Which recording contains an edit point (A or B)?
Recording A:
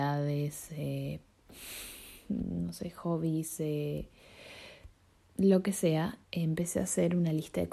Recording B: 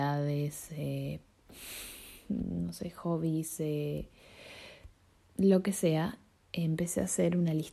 A